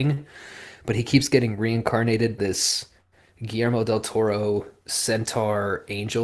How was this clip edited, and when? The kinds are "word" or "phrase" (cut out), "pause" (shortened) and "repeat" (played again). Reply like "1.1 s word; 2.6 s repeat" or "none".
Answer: 2.4 s word